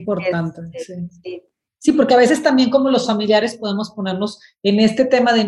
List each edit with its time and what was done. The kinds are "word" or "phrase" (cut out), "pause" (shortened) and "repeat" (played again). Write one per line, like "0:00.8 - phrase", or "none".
none

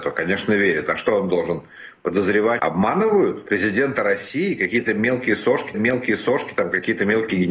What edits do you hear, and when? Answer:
0:02.6 - phrase
0:05.7 - repeat

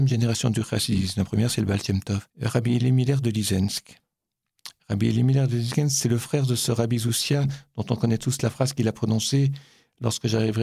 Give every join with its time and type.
0:02.3 - pause

